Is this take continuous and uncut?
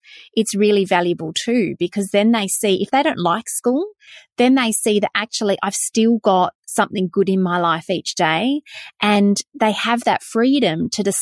yes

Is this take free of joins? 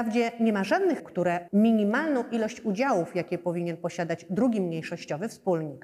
no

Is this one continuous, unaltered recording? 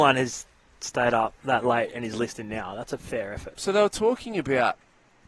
no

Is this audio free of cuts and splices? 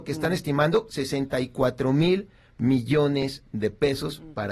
yes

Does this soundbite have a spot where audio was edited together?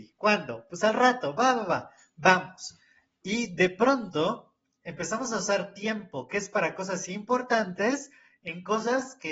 no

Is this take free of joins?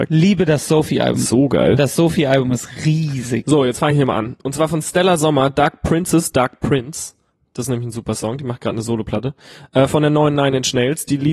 yes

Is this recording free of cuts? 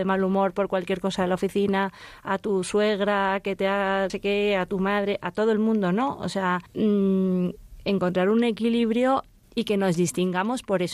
no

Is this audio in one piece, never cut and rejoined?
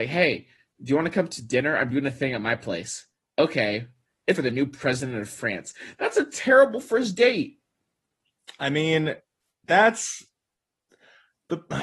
no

